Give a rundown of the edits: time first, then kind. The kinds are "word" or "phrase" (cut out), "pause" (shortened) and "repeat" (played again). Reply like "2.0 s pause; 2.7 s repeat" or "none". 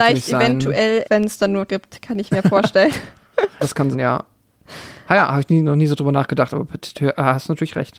1.0 s word; 1.7 s word; 3.6 s word; 3.9 s word